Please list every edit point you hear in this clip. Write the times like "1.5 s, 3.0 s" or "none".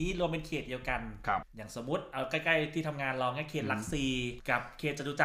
none